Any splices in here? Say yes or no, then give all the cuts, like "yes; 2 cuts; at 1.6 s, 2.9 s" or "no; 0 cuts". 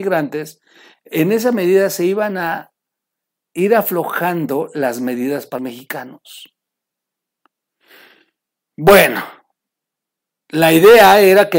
yes; 1 cut; at 5.6 s